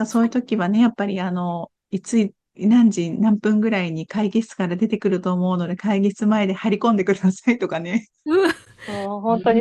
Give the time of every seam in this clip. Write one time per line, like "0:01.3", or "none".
none